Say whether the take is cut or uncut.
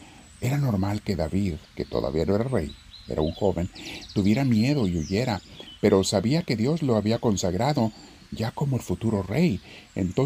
cut